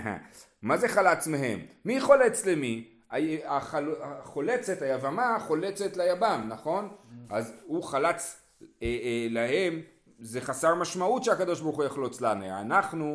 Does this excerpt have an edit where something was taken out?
no; 0 cuts

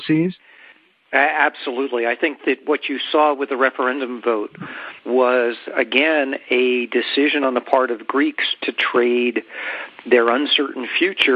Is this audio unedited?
no; 1 cut; at 5.0 s

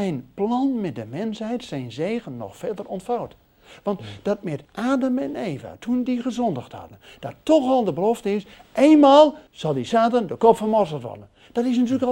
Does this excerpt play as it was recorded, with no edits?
no; 2 cuts; at 4.6 s, 9.5 s

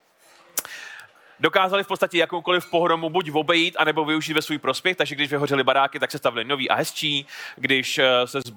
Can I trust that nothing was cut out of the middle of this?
yes; 0 cuts

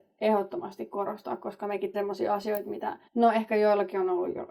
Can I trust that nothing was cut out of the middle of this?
no; 2 cuts; at 1.9 s, 3.1 s

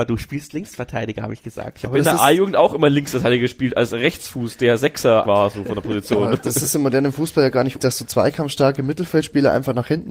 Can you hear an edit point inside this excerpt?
yes; 2 cuts; at 5.2 s, 7.8 s

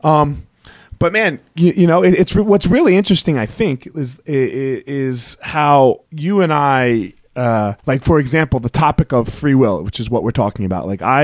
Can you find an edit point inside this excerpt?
yes; 2 cuts; at 6.0 s, 7.8 s

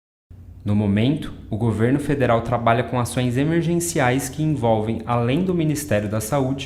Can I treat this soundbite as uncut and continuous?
yes; 0 cuts

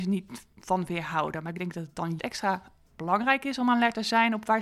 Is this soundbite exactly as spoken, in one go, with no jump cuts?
no; 1 cut; at 2.2 s

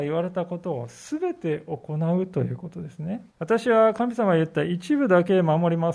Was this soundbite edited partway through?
yes; 1 cut; at 3.3 s

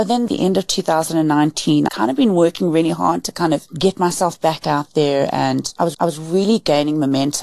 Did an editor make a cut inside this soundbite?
yes; 2 cuts; at 1.9 s, 5.9 s

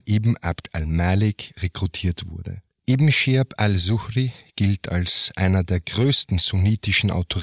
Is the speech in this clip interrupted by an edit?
yes; 1 cut; at 2.7 s

